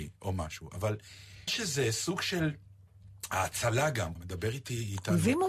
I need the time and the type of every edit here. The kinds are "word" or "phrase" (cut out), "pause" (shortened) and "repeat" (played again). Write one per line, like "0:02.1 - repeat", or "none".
0:01.5 - word
0:04.2 - word

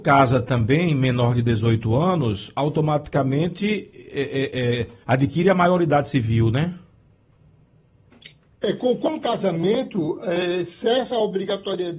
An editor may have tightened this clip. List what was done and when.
0:05.0 - pause

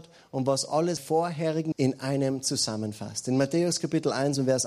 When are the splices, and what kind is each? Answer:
0:01.0 - word
0:01.7 - word

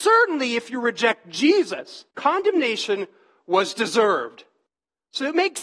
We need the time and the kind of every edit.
0:02.1 - pause

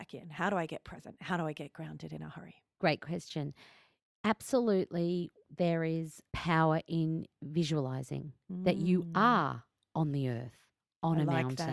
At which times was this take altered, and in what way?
0:06.3 - pause

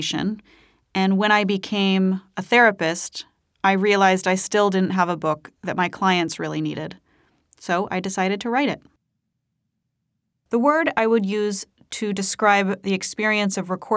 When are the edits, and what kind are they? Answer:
none

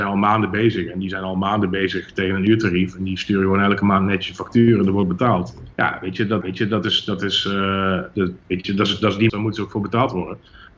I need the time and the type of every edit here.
0:05.7 - pause
0:06.4 - repeat
0:09.3 - phrase

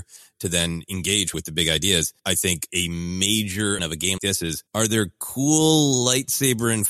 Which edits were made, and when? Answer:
0:01.3 - word
0:02.2 - pause
0:02.7 - word
0:03.8 - word
0:04.2 - word
0:04.7 - pause

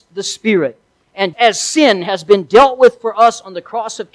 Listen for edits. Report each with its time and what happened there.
0:01.3 - word

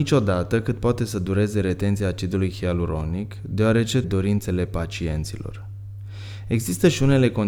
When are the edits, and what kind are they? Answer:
0:04.0 - phrase

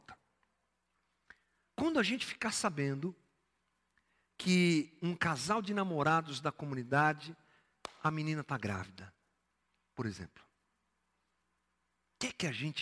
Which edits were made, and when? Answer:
none

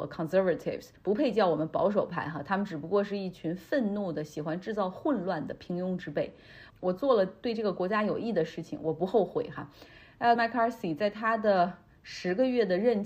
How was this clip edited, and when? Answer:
0:01.0 - pause
0:10.4 - phrase

